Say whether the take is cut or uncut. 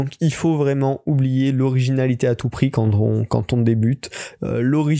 uncut